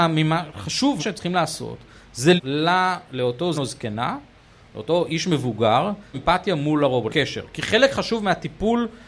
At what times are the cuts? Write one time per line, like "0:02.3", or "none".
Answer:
0:01.0
0:02.4
0:03.5
0:06.1
0:07.1